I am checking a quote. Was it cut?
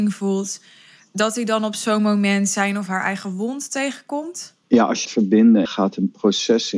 yes; 3 cuts; at 4.6 s, 5.1 s, 5.7 s

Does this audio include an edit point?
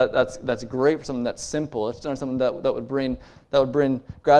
no; 0 cuts

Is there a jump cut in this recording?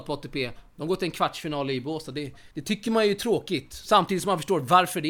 yes; 1 cut; at 2.5 s

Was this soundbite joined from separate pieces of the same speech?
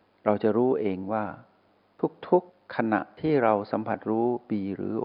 yes; 1 cut; at 2.5 s

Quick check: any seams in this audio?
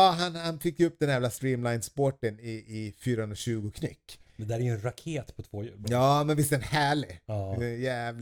no; 0 cuts

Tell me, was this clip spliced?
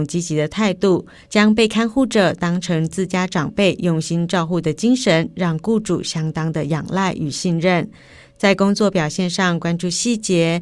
no; 0 cuts

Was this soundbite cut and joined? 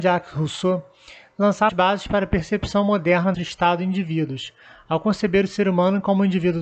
yes; 2 cuts; at 1.7 s, 3.3 s

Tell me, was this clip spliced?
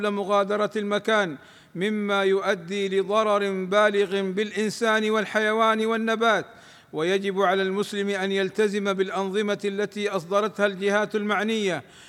no; 0 cuts

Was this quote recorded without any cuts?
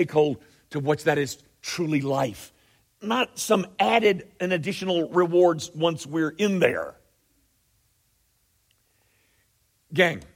yes; 0 cuts

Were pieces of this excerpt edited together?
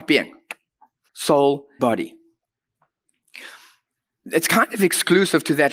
yes; 2 cuts; at 1.1 s, 1.8 s

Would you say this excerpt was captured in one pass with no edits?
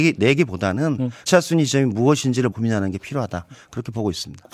no; 2 cuts; at 1.3 s, 2.5 s

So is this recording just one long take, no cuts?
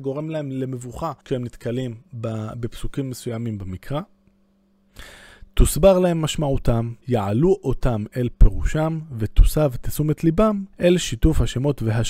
no; 3 cuts; at 1.2 s, 7.0 s, 10.7 s

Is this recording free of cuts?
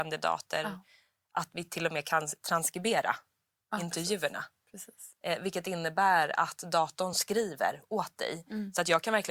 yes; 0 cuts

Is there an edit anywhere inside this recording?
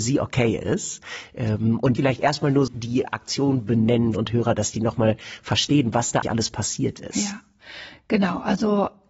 yes; 5 cuts; at 2.0 s, 2.7 s, 3.0 s, 4.1 s, 6.2 s

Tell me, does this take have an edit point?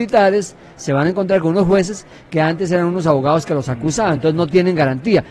no; 0 cuts

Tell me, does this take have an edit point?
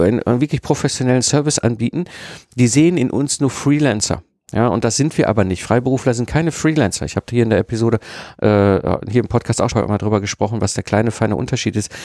yes; 1 cut; at 9.7 s

